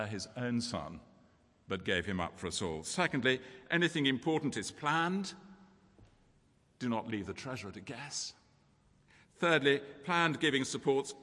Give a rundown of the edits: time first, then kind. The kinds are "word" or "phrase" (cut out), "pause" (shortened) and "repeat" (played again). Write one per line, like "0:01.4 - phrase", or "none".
none